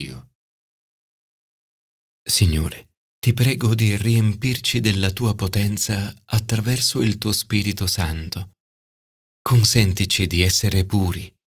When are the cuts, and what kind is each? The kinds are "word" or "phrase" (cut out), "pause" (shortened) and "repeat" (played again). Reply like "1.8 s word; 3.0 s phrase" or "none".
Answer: none